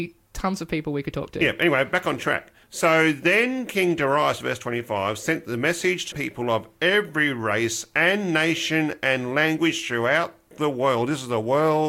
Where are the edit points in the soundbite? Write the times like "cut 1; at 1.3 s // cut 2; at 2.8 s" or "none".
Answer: cut 1; at 2.6 s // cut 2; at 6.1 s